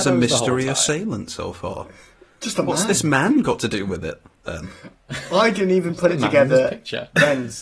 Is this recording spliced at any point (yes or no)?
no